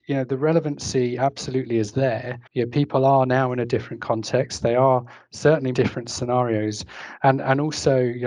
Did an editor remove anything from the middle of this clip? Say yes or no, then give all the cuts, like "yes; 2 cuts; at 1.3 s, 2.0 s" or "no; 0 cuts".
yes; 2 cuts; at 2.5 s, 5.7 s